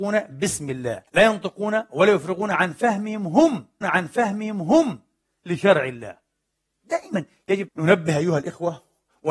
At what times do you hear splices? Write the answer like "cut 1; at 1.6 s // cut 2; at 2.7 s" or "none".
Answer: cut 1; at 1.1 s // cut 2; at 3.8 s // cut 3; at 7.7 s